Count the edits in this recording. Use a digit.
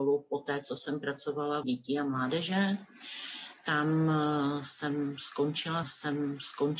2